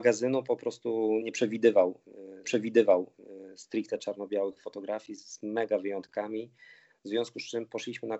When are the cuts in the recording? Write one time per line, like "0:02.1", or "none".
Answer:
0:01.2
0:02.4